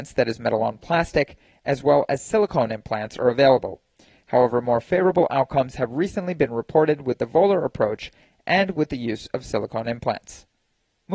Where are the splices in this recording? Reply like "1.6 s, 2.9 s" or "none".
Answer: none